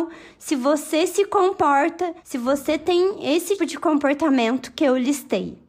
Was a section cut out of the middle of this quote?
yes; 2 cuts; at 2.2 s, 3.6 s

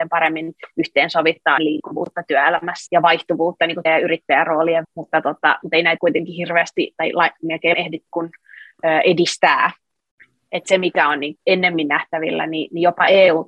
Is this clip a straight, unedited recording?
no; 9 cuts; at 1.6 s, 2.9 s, 3.8 s, 4.8 s, 6.0 s, 7.7 s, 8.1 s, 10.6 s, 11.4 s

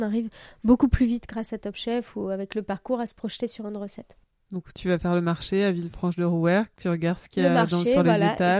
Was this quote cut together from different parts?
no; 0 cuts

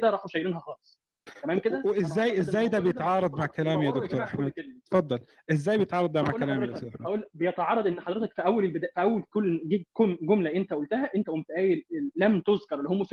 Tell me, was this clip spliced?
no; 0 cuts

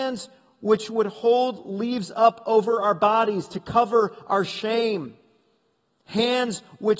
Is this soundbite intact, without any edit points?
yes; 0 cuts

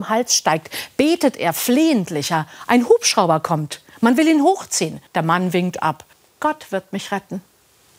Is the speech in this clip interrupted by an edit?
yes; 2 cuts; at 5.1 s, 6.1 s

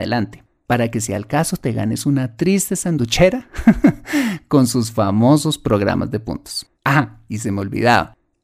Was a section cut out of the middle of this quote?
yes; 1 cut; at 6.7 s

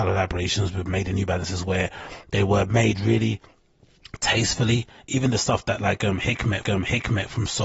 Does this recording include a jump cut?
yes; 2 cuts; at 1.1 s, 6.6 s

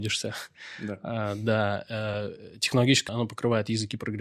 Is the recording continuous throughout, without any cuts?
no; 1 cut; at 3.1 s

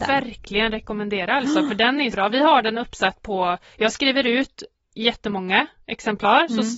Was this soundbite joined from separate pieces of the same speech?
yes; 1 cut; at 2.1 s

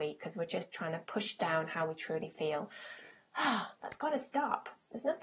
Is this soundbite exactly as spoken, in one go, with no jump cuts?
yes; 0 cuts

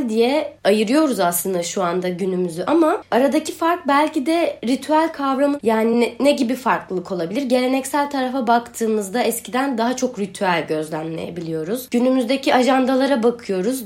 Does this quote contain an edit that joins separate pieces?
no; 0 cuts

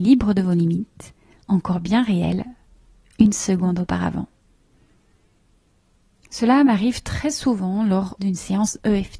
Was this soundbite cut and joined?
no; 0 cuts

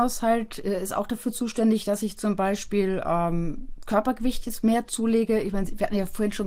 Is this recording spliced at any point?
no; 0 cuts

